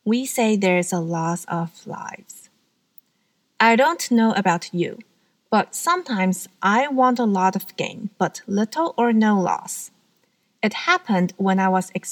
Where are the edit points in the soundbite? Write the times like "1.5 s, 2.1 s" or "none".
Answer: none